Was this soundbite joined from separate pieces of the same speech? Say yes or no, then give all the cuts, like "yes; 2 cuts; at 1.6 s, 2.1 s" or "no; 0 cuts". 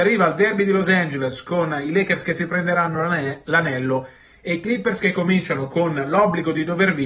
no; 0 cuts